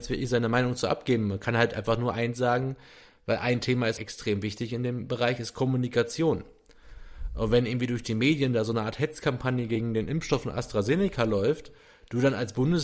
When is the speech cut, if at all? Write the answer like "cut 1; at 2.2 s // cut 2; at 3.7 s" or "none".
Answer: cut 1; at 4.0 s